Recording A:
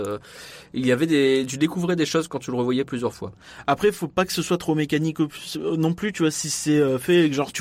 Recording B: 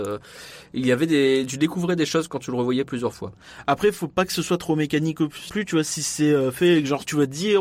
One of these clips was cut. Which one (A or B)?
B